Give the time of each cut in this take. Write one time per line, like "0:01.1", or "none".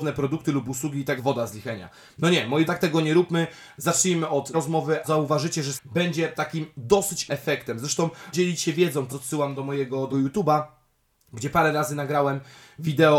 0:01.2
0:02.7
0:04.5
0:05.0
0:05.8
0:07.3
0:08.3
0:09.1
0:10.1